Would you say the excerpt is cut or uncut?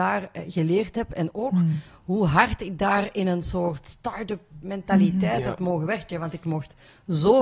uncut